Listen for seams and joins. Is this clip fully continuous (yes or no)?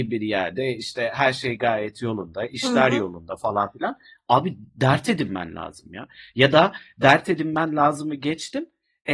yes